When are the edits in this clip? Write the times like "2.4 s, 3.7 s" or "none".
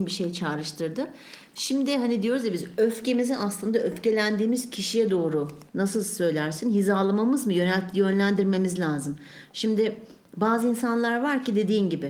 5.7 s